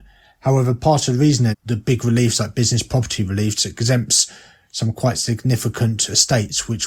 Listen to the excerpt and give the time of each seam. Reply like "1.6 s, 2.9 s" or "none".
1.5 s